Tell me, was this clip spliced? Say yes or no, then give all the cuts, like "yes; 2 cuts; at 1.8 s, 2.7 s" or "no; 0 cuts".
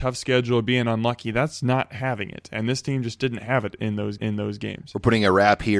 yes; 1 cut; at 4.2 s